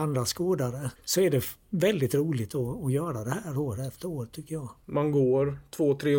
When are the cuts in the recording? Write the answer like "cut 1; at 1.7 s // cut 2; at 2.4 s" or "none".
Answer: cut 1; at 1.0 s // cut 2; at 4.8 s